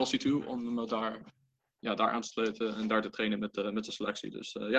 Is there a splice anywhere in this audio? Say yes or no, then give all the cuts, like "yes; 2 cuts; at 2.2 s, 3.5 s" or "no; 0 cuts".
no; 0 cuts